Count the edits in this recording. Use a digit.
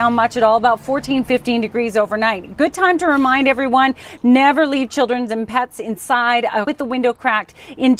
1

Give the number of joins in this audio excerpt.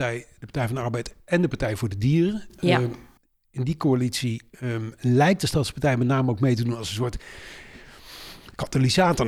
0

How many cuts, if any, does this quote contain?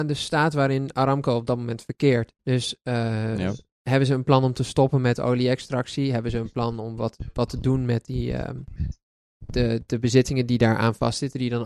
2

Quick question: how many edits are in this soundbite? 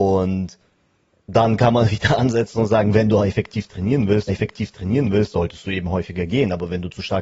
1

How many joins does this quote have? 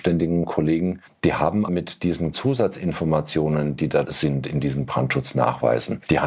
4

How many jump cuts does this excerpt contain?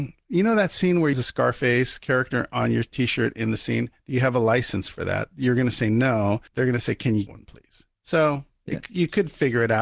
4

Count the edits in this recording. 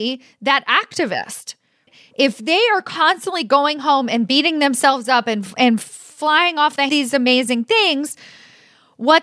1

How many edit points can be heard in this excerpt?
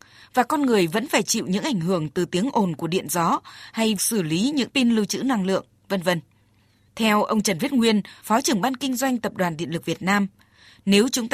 2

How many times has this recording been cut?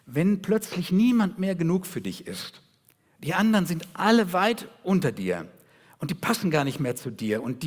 0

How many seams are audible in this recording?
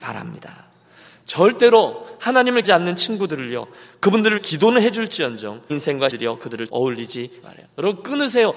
6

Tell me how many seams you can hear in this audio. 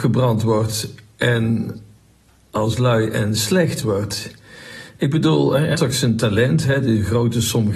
2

